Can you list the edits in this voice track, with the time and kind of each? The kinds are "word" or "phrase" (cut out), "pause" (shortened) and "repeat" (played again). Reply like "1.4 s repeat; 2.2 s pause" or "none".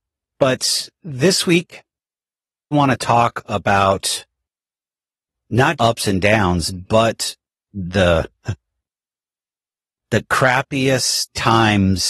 2.7 s word; 5.8 s word